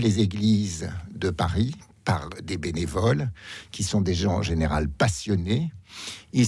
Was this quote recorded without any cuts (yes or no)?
yes